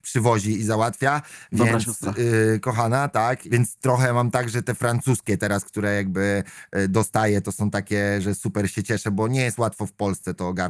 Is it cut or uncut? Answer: uncut